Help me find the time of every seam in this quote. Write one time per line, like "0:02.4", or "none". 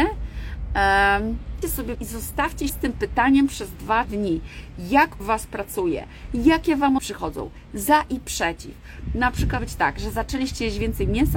0:01.6
0:01.9
0:02.7
0:04.0
0:05.2
0:07.0
0:09.6